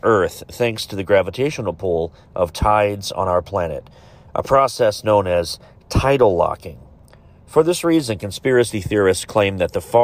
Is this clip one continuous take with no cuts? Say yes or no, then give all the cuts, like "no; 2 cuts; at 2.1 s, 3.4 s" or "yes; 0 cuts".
yes; 0 cuts